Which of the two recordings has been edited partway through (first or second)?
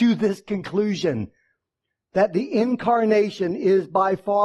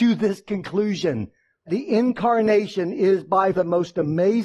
second